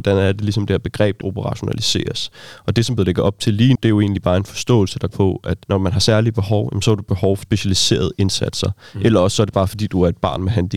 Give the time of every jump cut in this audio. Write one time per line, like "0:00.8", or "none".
0:01.2
0:03.0
0:03.8
0:05.1
0:05.6
0:07.4